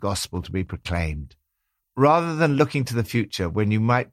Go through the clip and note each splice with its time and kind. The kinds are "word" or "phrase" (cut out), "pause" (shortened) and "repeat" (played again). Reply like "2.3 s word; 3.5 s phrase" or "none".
none